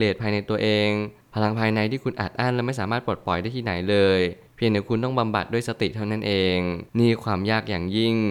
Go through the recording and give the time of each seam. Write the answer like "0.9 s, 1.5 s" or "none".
6.9 s